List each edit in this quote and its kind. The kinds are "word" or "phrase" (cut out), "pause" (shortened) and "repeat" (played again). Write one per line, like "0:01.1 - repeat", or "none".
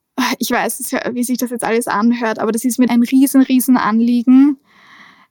0:02.9 - phrase